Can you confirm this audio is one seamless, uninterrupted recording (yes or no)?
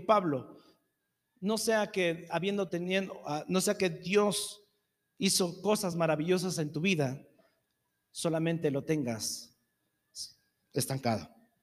yes